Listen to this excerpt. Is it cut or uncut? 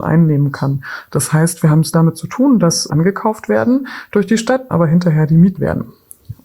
cut